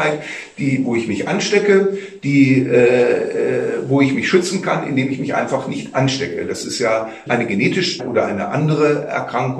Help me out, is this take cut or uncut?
cut